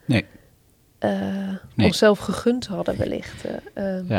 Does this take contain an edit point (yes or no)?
no